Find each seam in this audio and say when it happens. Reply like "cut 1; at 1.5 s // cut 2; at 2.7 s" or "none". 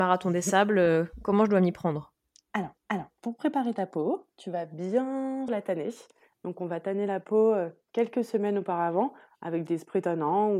cut 1; at 2.8 s // cut 2; at 5.5 s